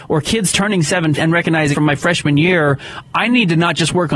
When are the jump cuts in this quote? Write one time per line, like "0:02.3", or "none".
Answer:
0:01.2
0:01.7